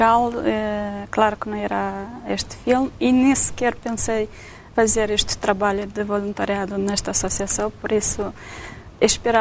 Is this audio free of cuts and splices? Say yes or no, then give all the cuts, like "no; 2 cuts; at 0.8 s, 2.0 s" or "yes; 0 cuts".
yes; 0 cuts